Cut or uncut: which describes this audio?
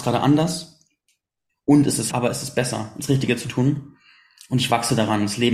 cut